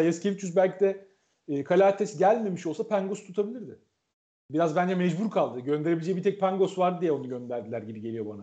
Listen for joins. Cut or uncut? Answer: cut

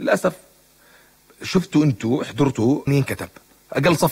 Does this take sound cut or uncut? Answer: cut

